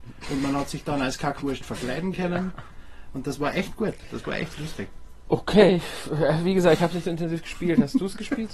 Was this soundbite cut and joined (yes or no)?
no